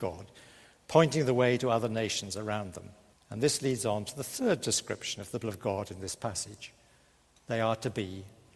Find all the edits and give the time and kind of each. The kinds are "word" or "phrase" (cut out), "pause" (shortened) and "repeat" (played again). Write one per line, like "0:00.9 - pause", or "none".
0:03.1 - pause
0:05.4 - word